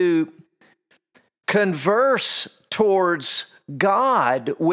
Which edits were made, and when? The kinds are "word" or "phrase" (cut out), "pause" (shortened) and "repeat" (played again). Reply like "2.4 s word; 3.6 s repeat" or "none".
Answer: none